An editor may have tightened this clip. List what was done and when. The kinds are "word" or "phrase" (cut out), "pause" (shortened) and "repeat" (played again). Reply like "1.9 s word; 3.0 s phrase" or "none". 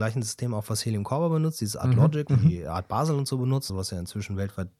2.3 s phrase; 3.7 s word